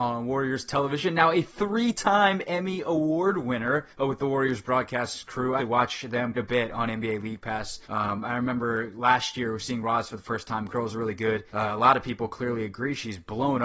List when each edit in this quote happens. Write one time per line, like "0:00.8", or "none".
0:03.9
0:05.6
0:06.3
0:07.8
0:10.7
0:11.5